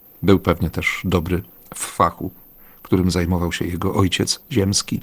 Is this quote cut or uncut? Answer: uncut